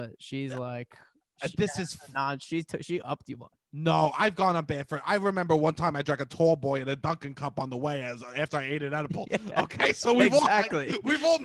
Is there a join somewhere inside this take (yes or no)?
yes